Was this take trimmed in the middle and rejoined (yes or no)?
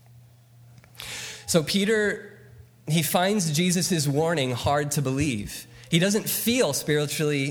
no